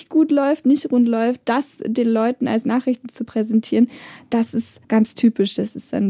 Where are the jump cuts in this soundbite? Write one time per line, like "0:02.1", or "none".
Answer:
0:04.8